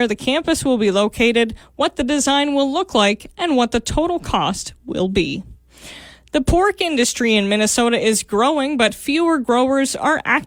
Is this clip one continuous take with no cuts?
yes; 0 cuts

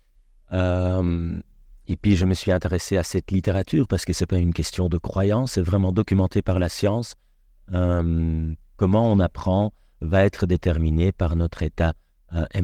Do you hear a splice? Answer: no; 0 cuts

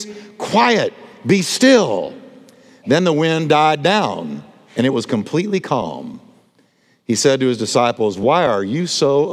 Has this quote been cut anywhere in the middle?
no; 0 cuts

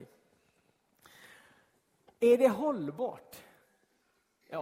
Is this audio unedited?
yes; 0 cuts

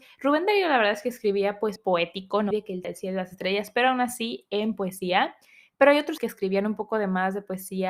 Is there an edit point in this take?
yes; 4 cuts; at 1.8 s, 2.5 s, 2.8 s, 6.2 s

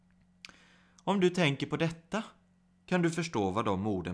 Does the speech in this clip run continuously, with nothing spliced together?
yes; 0 cuts

